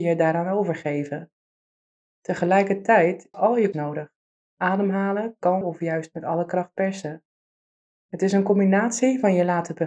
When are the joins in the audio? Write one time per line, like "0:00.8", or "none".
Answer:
0:03.3
0:03.7
0:05.6